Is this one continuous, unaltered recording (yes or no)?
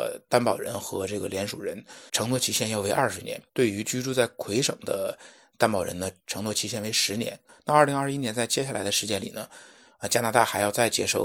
no